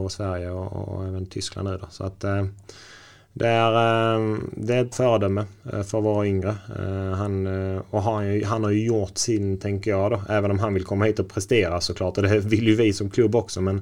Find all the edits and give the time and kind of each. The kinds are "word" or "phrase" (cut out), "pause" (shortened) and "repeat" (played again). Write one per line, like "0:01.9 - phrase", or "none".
0:04.9 - word